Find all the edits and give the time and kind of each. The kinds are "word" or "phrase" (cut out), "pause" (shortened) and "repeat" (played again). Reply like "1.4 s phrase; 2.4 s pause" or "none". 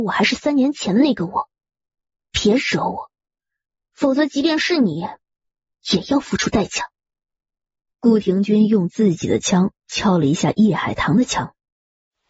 none